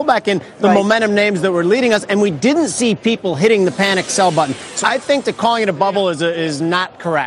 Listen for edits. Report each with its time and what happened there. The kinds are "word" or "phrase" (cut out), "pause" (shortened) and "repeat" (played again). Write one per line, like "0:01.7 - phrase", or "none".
0:04.8 - word